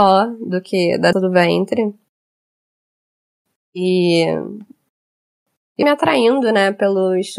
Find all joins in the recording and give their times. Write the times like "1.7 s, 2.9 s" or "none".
1.1 s, 5.8 s